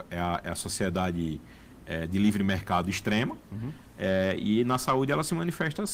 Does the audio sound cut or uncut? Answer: uncut